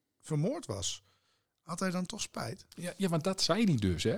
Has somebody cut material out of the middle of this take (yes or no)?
no